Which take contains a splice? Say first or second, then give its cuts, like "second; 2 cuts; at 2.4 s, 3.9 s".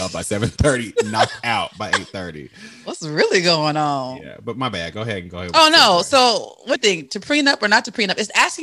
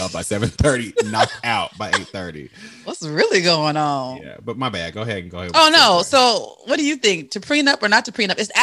first; 1 cut; at 6.8 s